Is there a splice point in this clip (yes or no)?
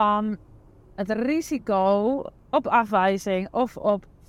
no